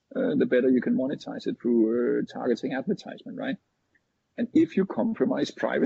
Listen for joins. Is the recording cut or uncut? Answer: uncut